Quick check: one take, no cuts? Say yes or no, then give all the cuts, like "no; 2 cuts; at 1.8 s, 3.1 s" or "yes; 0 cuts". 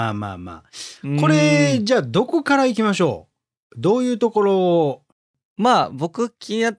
yes; 0 cuts